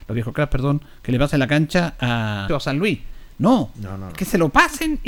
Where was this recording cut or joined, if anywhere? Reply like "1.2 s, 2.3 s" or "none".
2.5 s